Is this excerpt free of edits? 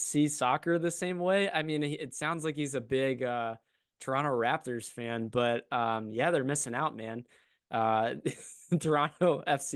yes; 0 cuts

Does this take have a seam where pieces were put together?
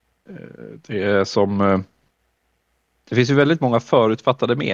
no; 0 cuts

